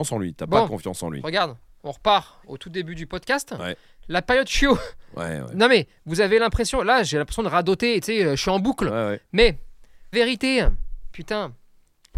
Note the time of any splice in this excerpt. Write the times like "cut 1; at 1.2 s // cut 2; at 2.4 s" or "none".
cut 1; at 1.6 s // cut 2; at 10.1 s